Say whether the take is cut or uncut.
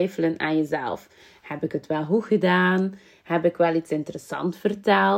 uncut